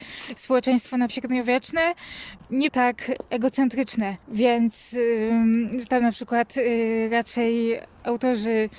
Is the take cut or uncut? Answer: cut